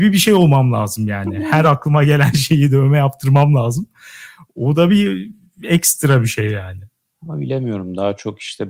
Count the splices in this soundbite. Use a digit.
0